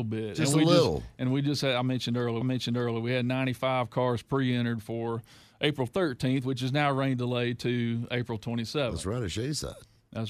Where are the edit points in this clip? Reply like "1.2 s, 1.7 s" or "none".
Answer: 2.4 s